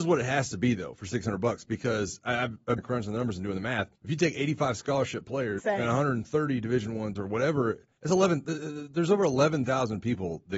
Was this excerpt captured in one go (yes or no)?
no